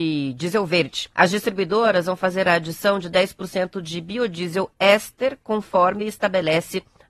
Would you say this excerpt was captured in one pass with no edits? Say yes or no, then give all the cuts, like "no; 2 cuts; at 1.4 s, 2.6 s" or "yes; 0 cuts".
no; 1 cut; at 1.1 s